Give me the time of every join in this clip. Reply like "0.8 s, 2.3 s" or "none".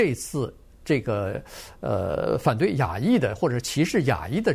none